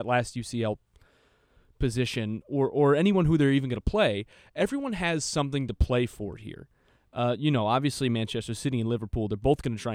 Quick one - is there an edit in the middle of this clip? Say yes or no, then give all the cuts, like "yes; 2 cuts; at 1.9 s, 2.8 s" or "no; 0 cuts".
no; 0 cuts